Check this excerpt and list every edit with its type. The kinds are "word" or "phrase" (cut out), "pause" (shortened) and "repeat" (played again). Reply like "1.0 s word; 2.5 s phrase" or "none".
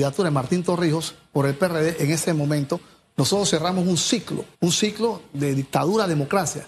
4.5 s pause